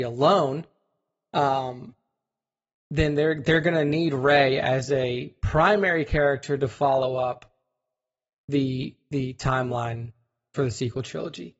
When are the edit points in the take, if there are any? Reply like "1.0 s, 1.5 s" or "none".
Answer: none